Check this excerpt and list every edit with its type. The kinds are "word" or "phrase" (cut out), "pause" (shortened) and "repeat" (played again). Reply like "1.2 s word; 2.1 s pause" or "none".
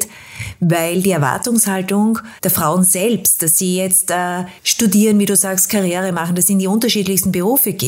2.4 s pause; 4.6 s pause